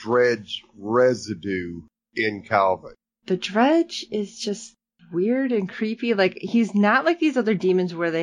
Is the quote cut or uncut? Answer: uncut